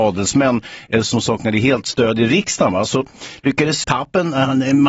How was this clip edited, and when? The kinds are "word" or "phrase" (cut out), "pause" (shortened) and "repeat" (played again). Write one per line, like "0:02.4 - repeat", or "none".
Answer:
0:03.8 - word

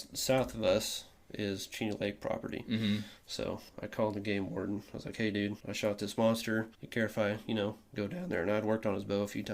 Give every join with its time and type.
0:03.7 - pause
0:05.6 - pause
0:06.7 - pause

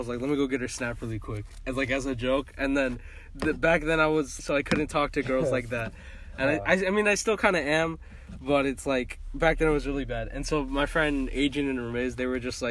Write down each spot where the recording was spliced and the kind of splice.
0:04.4 - phrase

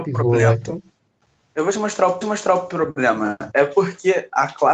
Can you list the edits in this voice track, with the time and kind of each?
0:01.0 - pause
0:02.2 - repeat

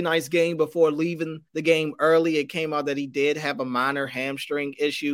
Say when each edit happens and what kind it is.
0:01.5 - pause

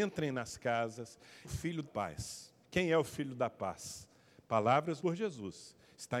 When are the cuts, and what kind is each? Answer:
0:01.4 - word
0:01.8 - word
0:02.6 - pause
0:05.0 - word

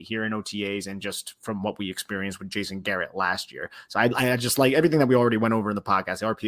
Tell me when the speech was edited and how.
none

